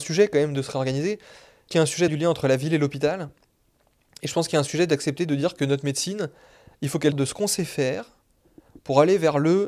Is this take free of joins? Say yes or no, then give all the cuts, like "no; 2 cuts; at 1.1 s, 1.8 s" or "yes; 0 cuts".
no; 3 cuts; at 1.7 s, 2.1 s, 7.1 s